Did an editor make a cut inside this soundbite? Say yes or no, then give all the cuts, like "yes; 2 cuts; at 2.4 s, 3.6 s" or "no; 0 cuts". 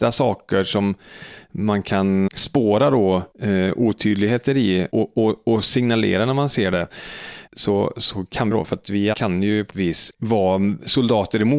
yes; 8 cuts; at 2.3 s, 3.3 s, 4.9 s, 7.5 s, 8.5 s, 9.1 s, 9.7 s, 10.1 s